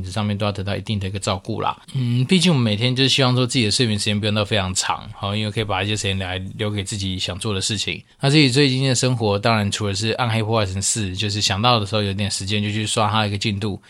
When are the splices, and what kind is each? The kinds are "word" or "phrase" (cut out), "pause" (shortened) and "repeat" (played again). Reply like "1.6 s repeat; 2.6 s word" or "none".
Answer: 1.8 s pause; 8.1 s pause